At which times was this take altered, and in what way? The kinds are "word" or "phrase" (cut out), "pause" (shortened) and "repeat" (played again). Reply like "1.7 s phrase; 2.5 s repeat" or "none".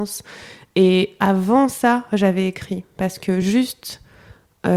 none